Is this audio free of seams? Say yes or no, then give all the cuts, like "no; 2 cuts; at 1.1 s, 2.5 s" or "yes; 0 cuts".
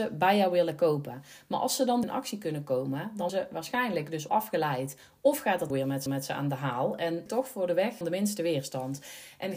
no; 7 cuts; at 2.0 s, 3.3 s, 4.3 s, 5.7 s, 6.1 s, 7.3 s, 8.0 s